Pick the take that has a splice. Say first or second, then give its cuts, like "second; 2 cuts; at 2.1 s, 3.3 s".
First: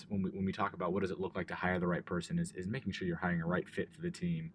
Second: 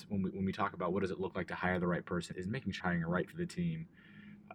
second; 3 cuts; at 2.3 s, 2.8 s, 3.3 s